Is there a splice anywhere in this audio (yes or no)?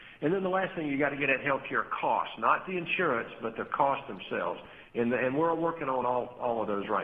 no